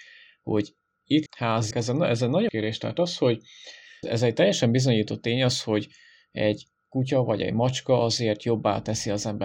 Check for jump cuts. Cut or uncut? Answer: cut